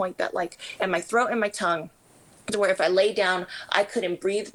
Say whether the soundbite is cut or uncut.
uncut